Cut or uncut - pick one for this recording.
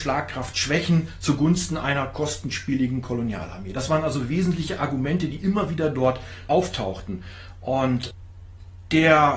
uncut